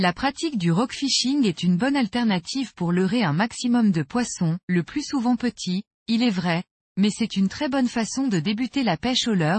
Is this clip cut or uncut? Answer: cut